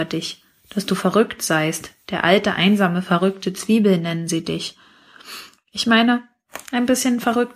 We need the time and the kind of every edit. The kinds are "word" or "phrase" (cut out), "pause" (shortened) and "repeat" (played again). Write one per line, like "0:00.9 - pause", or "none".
none